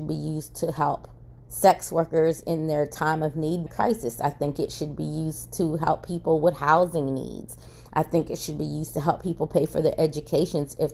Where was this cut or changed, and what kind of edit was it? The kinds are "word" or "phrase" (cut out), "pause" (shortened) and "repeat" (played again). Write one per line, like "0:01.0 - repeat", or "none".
0:01.4 - pause
0:03.7 - word